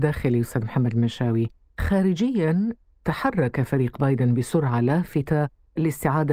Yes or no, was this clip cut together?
no